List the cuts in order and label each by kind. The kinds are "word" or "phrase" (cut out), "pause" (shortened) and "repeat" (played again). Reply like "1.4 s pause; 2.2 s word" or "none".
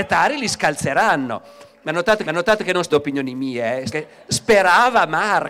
2.2 s repeat; 2.9 s word; 3.9 s phrase